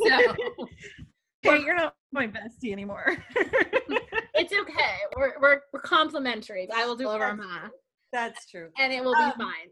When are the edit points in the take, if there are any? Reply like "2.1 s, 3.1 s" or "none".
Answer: 1.4 s, 6.7 s, 7.0 s